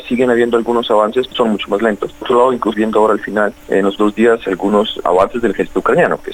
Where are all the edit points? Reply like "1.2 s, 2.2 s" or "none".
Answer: 1.3 s, 2.2 s, 2.7 s, 4.0 s

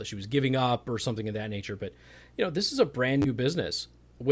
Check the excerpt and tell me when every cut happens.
none

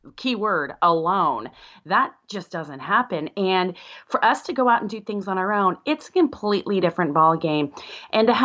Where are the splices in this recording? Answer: none

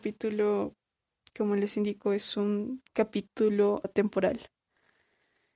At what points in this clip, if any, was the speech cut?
3.8 s

